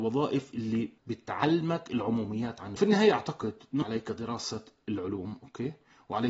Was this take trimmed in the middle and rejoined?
yes; 3 cuts; at 1.0 s, 2.8 s, 3.8 s

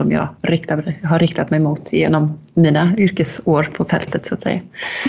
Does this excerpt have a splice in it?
yes; 1 cut; at 2.5 s

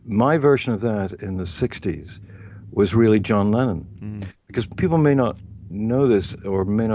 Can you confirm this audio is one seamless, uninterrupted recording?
yes; 0 cuts

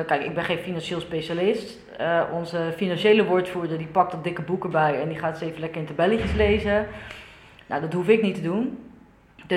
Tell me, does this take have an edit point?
no; 0 cuts

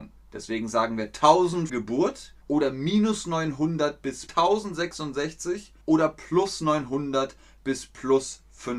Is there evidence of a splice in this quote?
yes; 4 cuts; at 1.7 s, 2.4 s, 4.3 s, 5.8 s

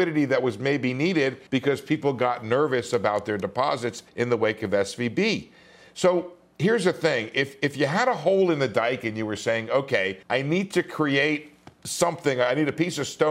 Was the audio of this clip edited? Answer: yes; 3 cuts; at 1.5 s, 4.1 s, 10.2 s

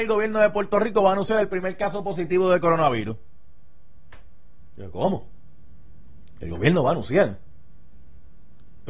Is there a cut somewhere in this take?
no; 0 cuts

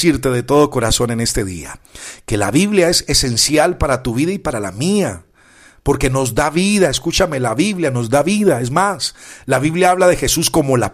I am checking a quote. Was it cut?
no; 0 cuts

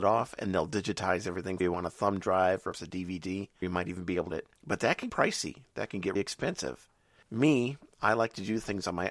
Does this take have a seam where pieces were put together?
yes; 6 cuts; at 1.6 s, 2.7 s, 3.6 s, 4.3 s, 5.1 s, 6.2 s

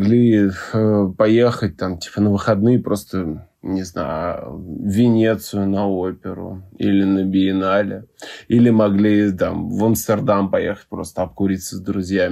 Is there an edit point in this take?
yes; 1 cut; at 3.5 s

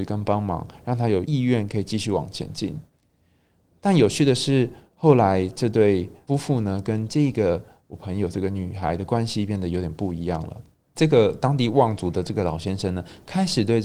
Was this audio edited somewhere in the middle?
no; 0 cuts

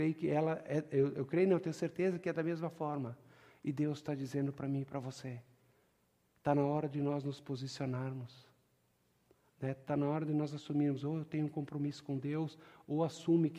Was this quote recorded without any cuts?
yes; 0 cuts

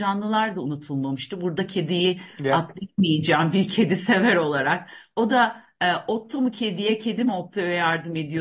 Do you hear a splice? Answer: no; 0 cuts

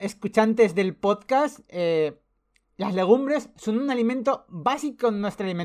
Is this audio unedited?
yes; 0 cuts

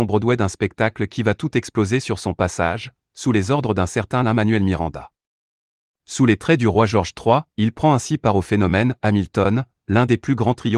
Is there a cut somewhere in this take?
yes; 1 cut; at 7.5 s

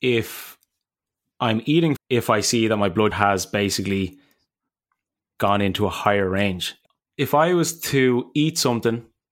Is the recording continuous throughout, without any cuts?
no; 2 cuts; at 2.0 s, 3.1 s

